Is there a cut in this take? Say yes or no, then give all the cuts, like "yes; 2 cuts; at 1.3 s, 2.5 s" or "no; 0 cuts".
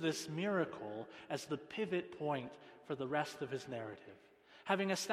no; 0 cuts